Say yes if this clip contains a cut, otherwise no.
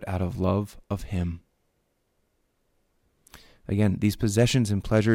no